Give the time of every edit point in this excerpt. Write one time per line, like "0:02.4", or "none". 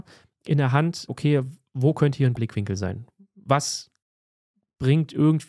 0:01.1
0:02.4